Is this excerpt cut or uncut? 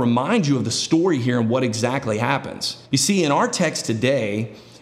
cut